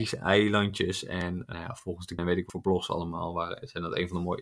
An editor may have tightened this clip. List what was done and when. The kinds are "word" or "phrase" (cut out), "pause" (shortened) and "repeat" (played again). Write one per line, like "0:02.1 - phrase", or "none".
0:01.5 - word
0:02.2 - word
0:02.5 - word